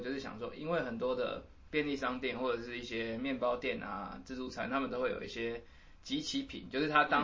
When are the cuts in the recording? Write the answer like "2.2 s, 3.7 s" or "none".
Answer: none